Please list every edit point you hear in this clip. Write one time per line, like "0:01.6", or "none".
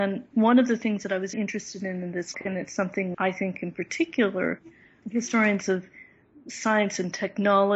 0:01.3
0:02.3
0:03.1
0:05.0